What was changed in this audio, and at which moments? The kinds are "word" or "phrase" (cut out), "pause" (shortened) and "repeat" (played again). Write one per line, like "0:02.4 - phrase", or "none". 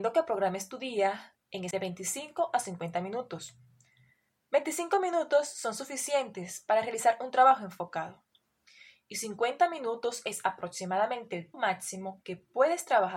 0:01.7 - word
0:11.5 - word